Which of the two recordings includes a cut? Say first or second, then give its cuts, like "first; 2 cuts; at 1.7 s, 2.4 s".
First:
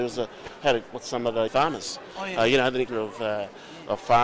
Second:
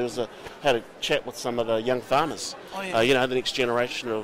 first; 3 cuts; at 0.9 s, 1.5 s, 2.9 s